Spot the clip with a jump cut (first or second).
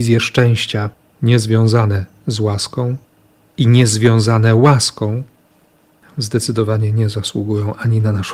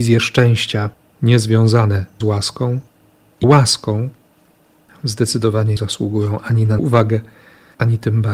second